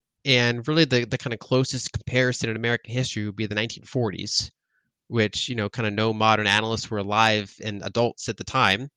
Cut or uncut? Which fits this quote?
uncut